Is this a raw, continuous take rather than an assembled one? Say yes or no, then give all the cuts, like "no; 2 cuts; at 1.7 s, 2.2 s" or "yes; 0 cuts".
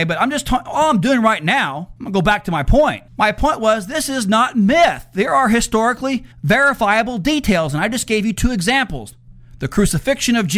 no; 3 cuts; at 2.0 s, 3.1 s, 6.3 s